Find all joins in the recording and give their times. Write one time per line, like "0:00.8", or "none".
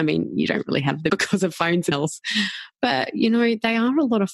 0:01.1
0:01.9